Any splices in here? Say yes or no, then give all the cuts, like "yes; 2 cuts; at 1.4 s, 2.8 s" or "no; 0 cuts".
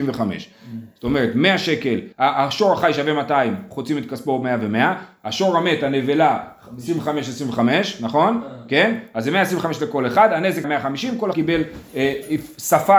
yes; 3 cuts; at 2.1 s, 10.6 s, 11.3 s